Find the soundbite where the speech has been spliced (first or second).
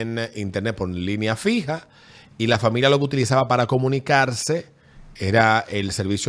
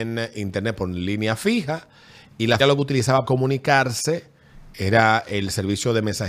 second